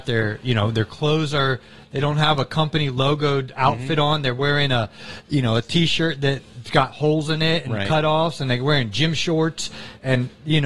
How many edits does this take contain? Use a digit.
0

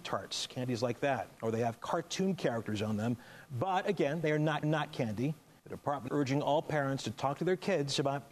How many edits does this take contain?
2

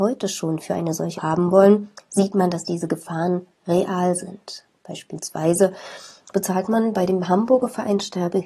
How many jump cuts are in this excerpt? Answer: 1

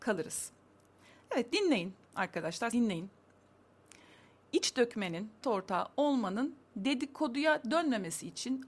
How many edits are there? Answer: 3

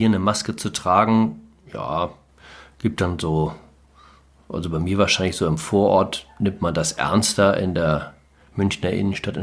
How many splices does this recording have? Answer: 0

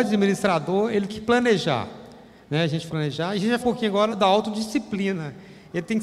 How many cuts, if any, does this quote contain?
4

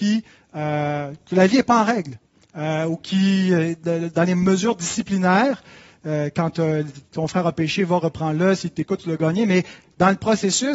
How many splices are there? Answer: 0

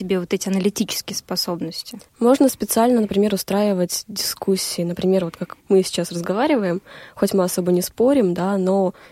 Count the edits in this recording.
2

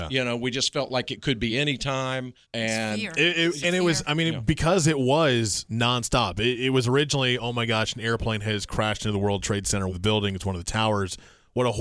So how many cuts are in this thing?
4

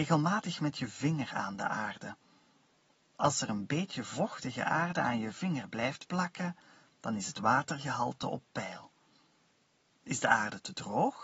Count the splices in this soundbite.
0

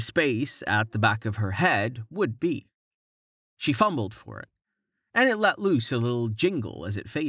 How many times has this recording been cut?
0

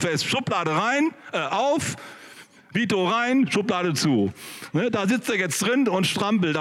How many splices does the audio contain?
0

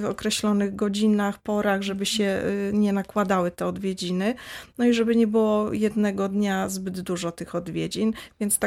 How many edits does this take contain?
0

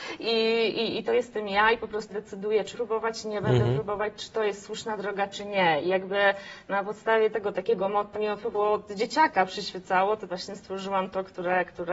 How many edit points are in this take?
6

